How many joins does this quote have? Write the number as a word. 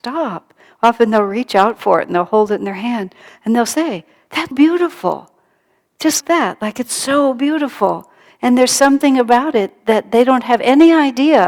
two